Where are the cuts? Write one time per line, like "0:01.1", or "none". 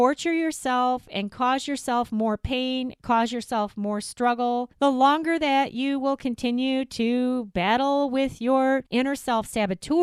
0:04.7
0:08.9